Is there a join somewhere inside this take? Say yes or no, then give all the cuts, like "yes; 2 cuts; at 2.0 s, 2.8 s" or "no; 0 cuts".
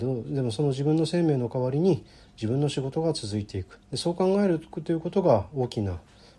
yes; 1 cut; at 3.8 s